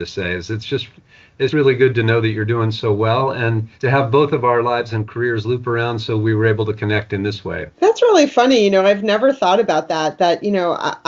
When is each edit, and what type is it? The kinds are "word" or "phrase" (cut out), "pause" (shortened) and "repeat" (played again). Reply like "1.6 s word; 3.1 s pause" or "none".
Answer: 1.5 s word; 3.7 s pause; 7.7 s pause